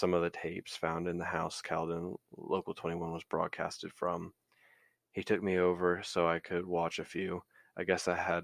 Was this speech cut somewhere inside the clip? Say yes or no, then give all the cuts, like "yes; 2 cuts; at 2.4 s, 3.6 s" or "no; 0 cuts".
no; 0 cuts